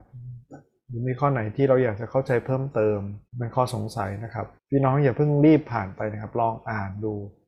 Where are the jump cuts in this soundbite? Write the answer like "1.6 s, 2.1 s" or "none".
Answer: 3.3 s, 4.6 s

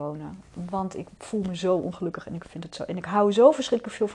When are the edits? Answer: none

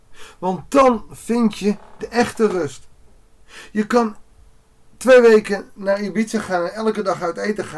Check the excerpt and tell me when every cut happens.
none

